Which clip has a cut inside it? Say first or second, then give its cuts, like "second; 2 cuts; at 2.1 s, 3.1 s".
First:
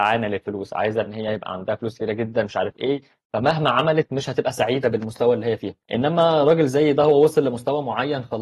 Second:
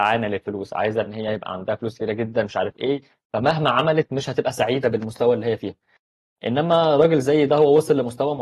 first; 1 cut; at 5.8 s